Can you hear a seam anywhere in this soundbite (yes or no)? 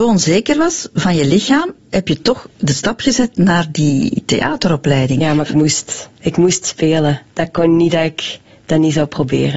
no